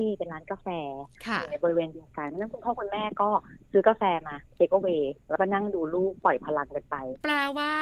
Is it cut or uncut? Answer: cut